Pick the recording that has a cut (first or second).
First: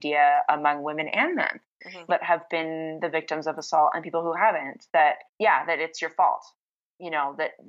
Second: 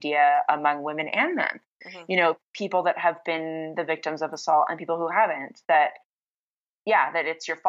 first